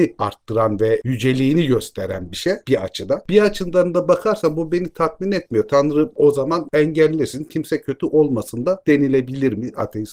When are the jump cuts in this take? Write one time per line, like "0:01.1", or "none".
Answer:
none